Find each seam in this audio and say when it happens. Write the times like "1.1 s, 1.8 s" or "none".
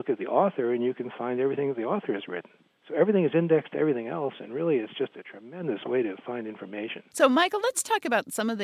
none